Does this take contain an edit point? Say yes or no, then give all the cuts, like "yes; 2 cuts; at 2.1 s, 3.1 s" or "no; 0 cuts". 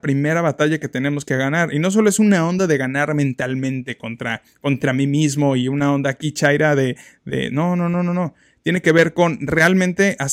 no; 0 cuts